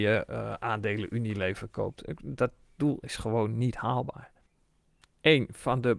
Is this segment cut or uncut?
uncut